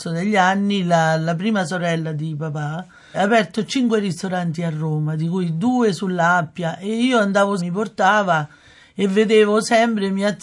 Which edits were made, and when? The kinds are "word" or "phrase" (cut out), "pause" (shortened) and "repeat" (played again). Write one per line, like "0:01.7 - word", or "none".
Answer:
0:03.1 - word
0:07.6 - phrase